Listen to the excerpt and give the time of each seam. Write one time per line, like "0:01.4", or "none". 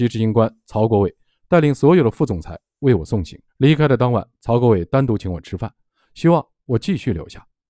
0:03.5